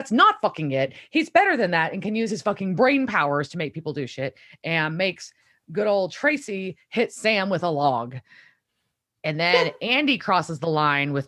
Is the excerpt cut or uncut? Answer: uncut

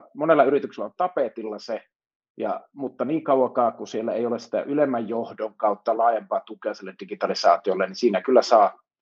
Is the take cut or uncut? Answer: uncut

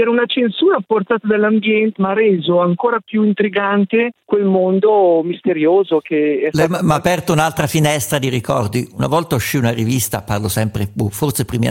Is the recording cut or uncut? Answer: cut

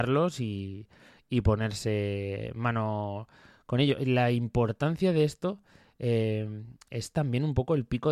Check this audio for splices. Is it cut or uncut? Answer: uncut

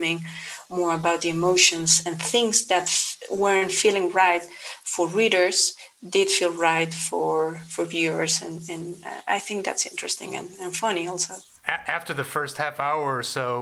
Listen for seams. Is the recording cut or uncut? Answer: uncut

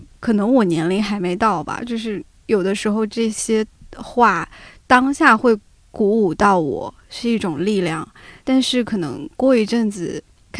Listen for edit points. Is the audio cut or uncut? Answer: uncut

